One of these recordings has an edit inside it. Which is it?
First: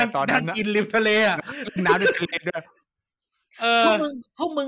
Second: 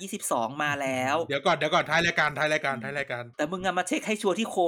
second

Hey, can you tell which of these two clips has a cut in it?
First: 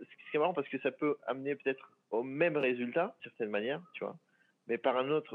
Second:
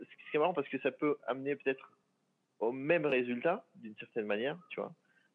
first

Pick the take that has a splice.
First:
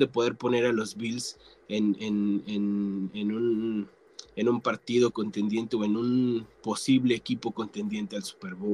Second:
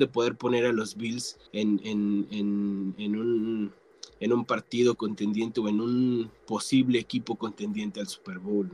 second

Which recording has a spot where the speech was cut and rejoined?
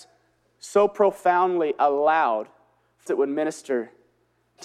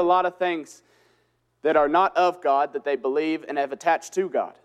first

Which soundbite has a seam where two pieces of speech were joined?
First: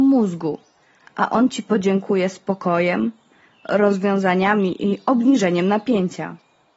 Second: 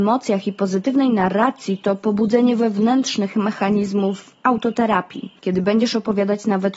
second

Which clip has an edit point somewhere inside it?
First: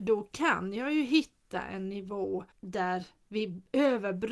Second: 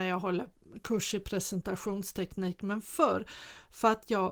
first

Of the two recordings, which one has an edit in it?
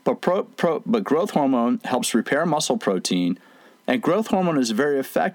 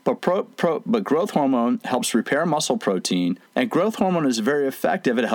second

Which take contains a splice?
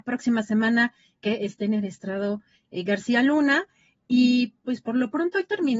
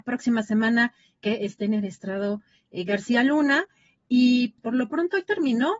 second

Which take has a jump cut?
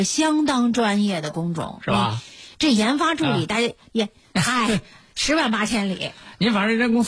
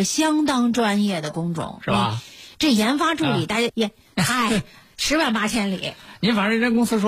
second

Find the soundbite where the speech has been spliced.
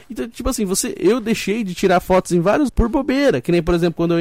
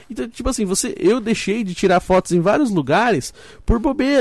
first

